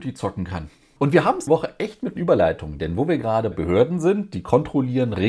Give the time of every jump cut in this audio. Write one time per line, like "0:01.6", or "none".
0:01.5
0:02.2
0:03.5